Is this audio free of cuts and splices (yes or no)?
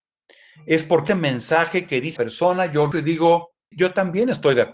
no